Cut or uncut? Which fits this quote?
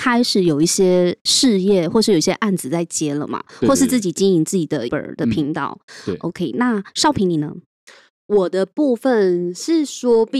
cut